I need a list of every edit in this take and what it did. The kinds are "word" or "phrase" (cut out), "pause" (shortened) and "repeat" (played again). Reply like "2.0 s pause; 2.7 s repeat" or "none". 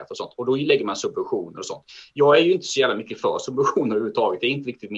none